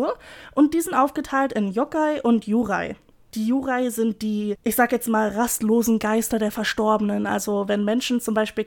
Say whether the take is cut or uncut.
uncut